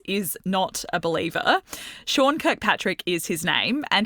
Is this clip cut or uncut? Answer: uncut